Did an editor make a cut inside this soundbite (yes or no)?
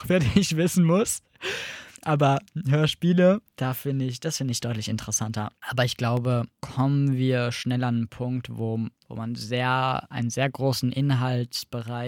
yes